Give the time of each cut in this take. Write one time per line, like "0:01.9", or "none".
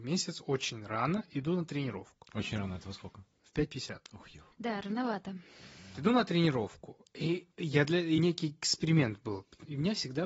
0:04.5
0:05.9
0:07.5
0:08.2